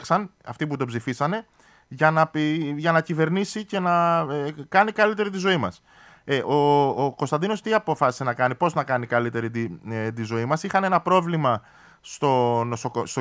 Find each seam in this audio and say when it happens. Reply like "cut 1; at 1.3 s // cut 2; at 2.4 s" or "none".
none